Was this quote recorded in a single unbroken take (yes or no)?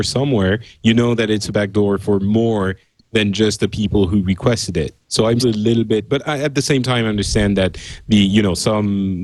no